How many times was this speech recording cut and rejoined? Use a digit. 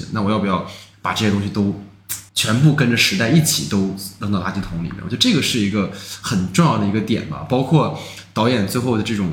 1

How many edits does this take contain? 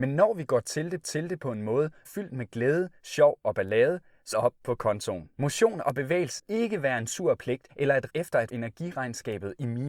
8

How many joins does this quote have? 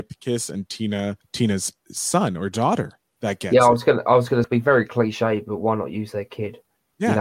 2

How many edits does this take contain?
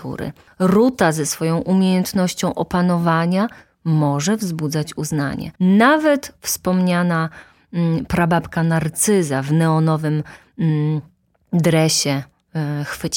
1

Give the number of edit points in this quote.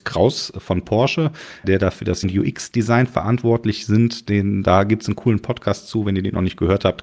2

